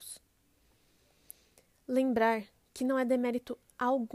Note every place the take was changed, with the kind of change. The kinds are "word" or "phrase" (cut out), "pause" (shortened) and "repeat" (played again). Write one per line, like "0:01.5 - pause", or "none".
none